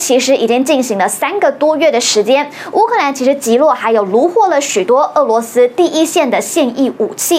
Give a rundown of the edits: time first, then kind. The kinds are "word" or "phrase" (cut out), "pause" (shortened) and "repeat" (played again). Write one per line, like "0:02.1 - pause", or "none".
none